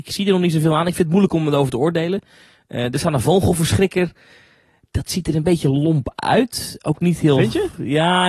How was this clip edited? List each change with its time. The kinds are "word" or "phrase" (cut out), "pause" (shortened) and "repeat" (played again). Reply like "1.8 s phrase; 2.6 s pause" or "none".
none